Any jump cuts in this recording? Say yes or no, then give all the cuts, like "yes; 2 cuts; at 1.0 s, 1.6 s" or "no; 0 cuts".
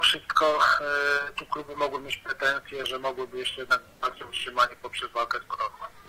yes; 1 cut; at 2.8 s